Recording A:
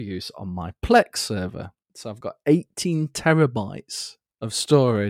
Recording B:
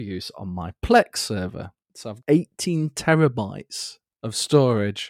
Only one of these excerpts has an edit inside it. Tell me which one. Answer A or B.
B